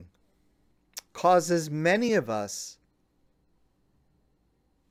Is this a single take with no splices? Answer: yes; 0 cuts

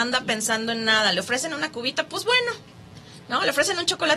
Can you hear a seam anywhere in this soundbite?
no; 0 cuts

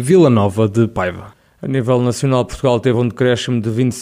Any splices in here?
no; 0 cuts

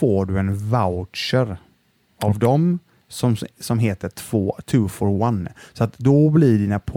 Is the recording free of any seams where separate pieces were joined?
yes; 0 cuts

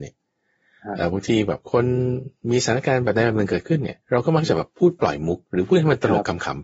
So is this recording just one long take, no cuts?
no; 3 cuts; at 1.6 s, 4.0 s, 5.4 s

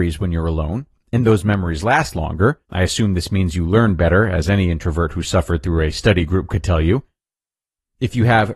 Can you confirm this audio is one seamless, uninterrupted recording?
no; 1 cut; at 2.6 s

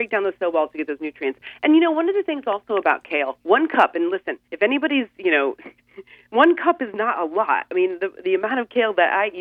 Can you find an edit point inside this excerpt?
yes; 2 cuts; at 4.4 s, 5.8 s

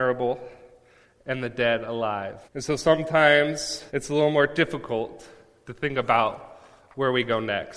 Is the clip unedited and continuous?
no; 2 cuts; at 2.4 s, 3.9 s

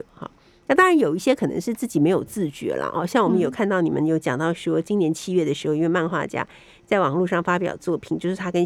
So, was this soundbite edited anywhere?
no; 0 cuts

